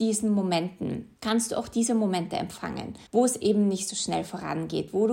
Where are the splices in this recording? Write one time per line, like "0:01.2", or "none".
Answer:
0:01.2
0:03.1